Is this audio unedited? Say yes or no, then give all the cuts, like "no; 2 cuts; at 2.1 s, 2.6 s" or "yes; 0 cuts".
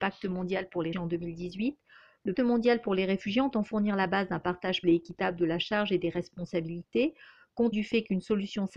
no; 4 cuts; at 0.9 s, 2.3 s, 4.8 s, 7.7 s